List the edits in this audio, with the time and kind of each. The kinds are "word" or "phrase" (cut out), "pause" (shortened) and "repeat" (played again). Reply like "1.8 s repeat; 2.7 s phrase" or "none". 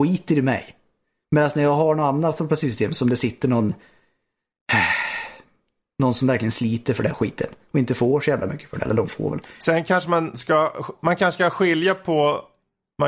none